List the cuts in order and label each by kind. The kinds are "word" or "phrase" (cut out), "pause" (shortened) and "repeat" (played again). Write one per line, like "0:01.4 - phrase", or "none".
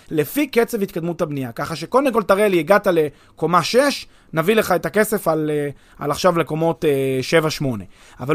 none